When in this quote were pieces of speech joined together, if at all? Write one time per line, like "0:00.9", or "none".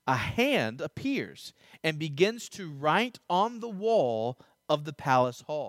none